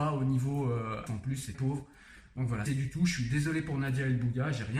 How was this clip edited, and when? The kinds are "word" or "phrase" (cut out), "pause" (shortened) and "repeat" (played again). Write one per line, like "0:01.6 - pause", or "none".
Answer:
0:01.1 - word
0:01.5 - word
0:02.7 - phrase